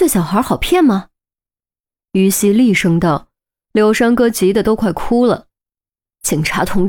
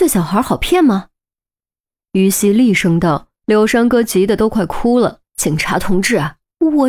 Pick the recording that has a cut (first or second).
second